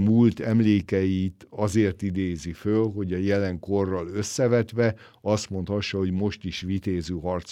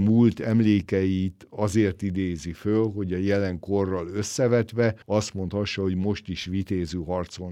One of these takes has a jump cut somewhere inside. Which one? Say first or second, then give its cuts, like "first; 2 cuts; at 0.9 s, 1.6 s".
second; 1 cut; at 5.0 s